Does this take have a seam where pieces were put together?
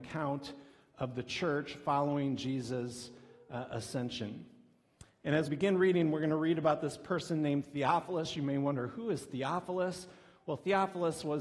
yes; 1 cut; at 5.5 s

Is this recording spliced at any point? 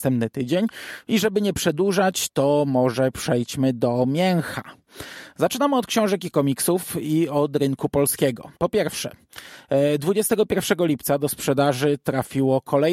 yes; 1 cut; at 8.6 s

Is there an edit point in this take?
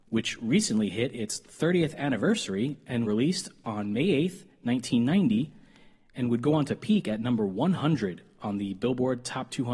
yes; 1 cut; at 3.0 s

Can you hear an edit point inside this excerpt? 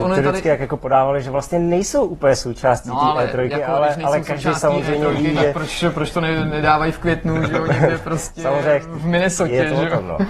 no; 0 cuts

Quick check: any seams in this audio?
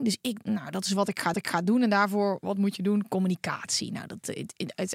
yes; 1 cut; at 1.3 s

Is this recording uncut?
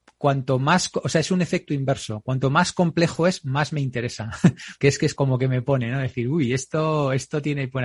no; 2 cuts; at 4.8 s, 5.2 s

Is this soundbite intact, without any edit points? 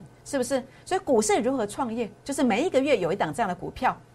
no; 1 cut; at 2.2 s

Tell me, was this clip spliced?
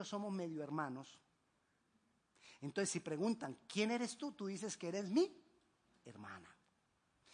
no; 0 cuts

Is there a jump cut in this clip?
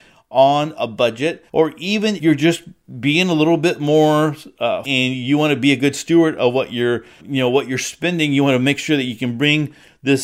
yes; 4 cuts; at 1.5 s, 2.2 s, 4.8 s, 7.2 s

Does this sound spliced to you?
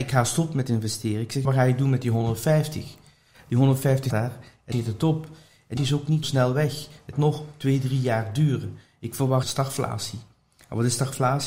yes; 7 cuts; at 1.4 s, 4.1 s, 4.7 s, 5.8 s, 6.2 s, 7.1 s, 9.4 s

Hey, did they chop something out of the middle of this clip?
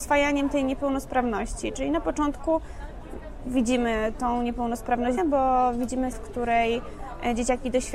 yes; 2 cuts; at 5.2 s, 6.1 s

